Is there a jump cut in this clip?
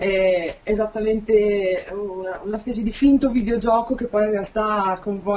no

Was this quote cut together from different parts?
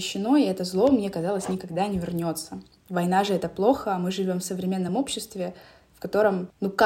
no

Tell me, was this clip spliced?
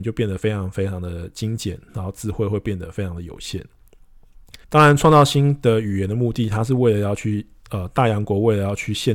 yes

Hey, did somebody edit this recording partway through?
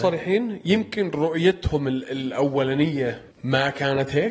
yes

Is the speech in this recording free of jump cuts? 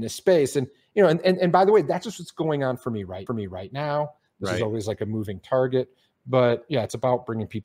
no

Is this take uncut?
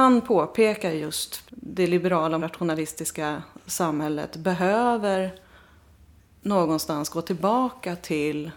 no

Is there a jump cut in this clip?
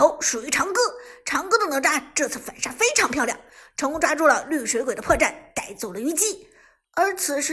no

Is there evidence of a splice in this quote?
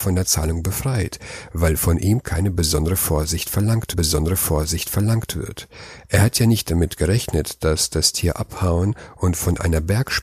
yes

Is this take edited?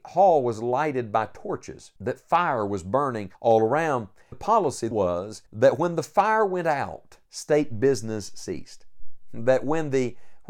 yes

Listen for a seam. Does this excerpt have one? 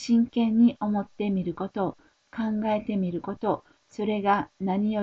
no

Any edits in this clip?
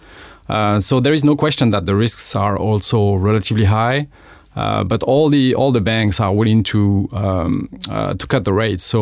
no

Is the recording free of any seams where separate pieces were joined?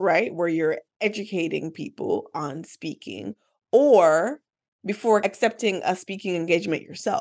yes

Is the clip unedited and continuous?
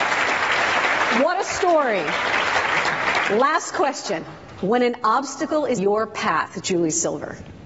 no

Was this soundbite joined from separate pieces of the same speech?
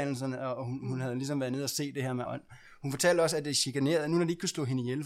yes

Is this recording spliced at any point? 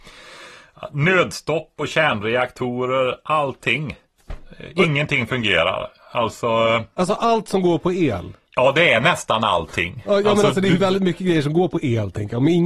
yes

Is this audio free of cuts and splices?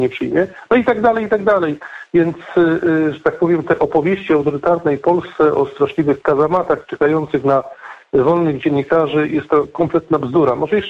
yes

